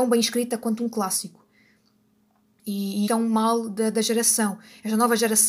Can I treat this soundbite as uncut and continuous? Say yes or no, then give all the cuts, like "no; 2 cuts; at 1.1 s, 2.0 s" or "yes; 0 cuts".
no; 1 cut; at 3.1 s